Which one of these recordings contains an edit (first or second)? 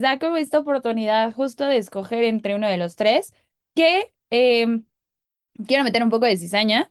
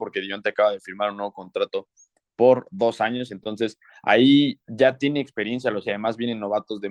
second